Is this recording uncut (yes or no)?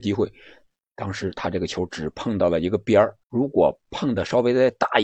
no